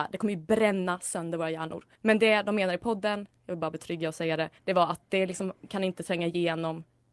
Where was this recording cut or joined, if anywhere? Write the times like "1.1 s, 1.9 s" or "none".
1.9 s, 4.6 s

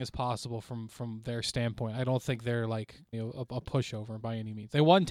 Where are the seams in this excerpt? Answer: 3.1 s

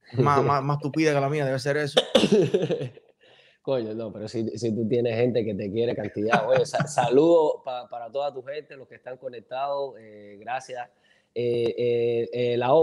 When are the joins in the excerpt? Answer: none

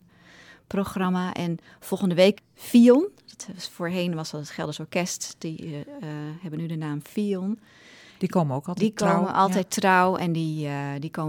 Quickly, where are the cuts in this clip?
2.3 s

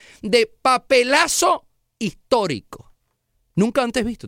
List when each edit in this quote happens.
none

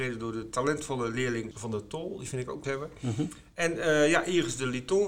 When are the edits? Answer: 1.5 s, 2.6 s

